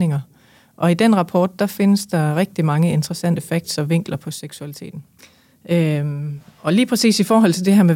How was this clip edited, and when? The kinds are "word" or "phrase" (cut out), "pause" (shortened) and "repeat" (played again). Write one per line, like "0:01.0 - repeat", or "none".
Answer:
0:05.2 - pause